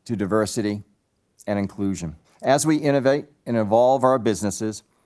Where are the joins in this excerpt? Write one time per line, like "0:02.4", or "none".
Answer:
0:02.2